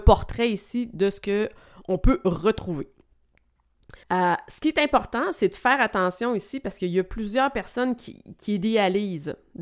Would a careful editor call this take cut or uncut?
cut